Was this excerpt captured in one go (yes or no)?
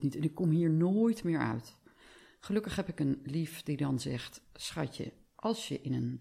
yes